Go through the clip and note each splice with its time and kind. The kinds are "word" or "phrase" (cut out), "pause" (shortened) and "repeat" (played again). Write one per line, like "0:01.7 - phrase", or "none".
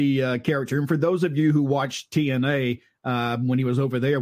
none